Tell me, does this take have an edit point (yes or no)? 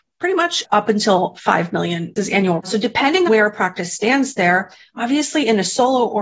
yes